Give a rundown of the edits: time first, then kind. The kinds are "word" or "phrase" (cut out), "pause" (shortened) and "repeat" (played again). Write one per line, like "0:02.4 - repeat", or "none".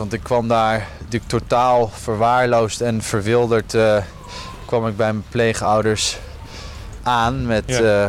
none